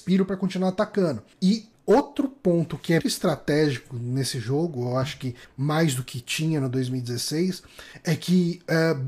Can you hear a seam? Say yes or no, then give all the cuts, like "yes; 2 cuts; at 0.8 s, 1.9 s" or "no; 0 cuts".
yes; 2 cuts; at 1.3 s, 3.0 s